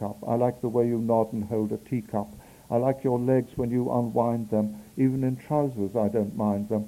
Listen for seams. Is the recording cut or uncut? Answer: uncut